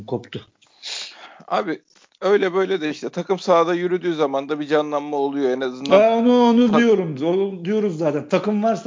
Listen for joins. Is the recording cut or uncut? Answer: uncut